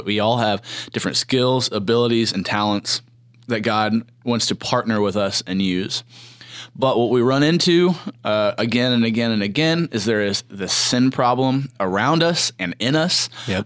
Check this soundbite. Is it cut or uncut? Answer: cut